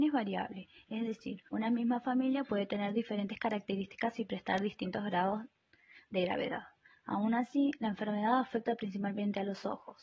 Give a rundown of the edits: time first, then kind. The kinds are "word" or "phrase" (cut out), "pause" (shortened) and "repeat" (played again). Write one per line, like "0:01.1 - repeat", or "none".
0:01.5 - pause